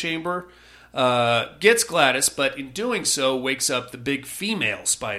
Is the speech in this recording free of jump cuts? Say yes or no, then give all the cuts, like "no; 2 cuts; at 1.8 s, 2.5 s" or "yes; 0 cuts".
yes; 0 cuts